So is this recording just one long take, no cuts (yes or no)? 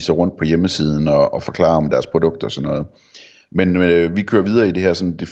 yes